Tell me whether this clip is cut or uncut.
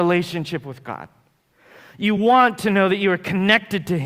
uncut